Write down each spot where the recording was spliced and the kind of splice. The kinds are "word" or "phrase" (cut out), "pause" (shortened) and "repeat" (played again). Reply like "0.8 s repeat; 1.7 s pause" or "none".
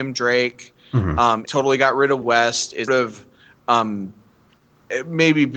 1.4 s word; 2.2 s word; 2.9 s word